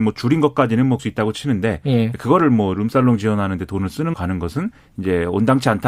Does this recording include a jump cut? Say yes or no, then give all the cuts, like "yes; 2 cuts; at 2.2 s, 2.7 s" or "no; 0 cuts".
yes; 2 cuts; at 1.0 s, 4.1 s